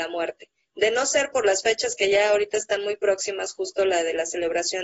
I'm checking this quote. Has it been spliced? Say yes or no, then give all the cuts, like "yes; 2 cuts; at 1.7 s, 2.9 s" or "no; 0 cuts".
no; 0 cuts